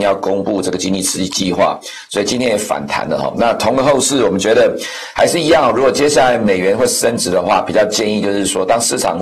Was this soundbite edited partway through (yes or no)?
no